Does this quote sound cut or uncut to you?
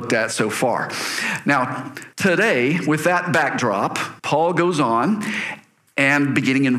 cut